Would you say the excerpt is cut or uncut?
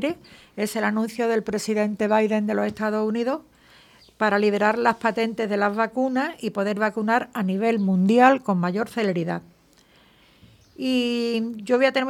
uncut